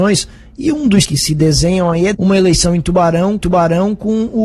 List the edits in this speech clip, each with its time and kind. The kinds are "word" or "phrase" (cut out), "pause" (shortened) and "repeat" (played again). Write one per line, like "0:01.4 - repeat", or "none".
0:01.0 - word
0:02.1 - word
0:03.4 - repeat